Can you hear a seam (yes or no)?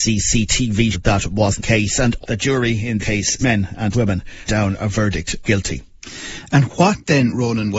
yes